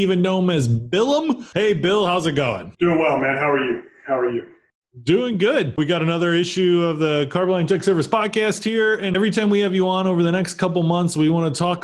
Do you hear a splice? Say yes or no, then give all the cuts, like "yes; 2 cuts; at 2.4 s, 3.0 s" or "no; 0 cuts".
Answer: yes; 1 cut; at 2.7 s